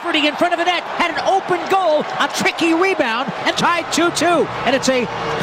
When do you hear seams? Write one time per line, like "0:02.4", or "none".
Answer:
0:02.3
0:03.5